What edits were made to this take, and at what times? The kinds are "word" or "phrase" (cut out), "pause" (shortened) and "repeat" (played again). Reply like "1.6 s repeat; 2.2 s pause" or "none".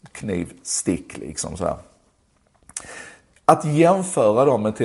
none